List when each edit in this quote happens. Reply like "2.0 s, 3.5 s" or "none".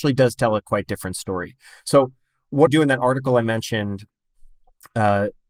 2.7 s